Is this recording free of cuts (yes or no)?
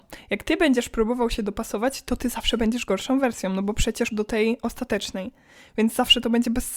no